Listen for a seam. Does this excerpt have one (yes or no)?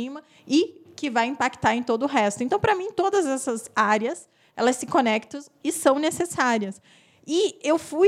no